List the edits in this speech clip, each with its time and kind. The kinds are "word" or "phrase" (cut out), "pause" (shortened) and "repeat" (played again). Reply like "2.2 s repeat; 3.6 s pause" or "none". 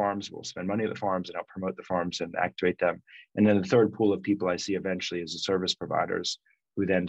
none